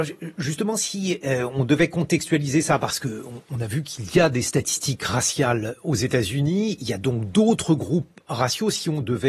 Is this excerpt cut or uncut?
uncut